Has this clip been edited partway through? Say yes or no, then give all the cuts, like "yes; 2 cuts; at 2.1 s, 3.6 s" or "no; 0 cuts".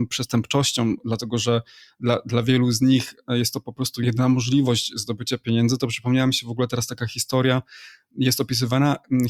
no; 0 cuts